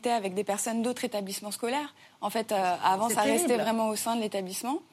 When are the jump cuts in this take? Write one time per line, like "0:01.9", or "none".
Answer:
none

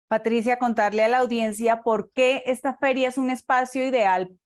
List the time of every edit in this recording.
none

